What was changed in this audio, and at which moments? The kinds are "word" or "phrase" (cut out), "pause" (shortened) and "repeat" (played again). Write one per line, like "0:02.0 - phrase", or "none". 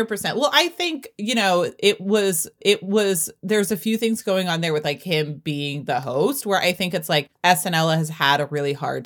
0:02.6 - repeat
0:07.3 - pause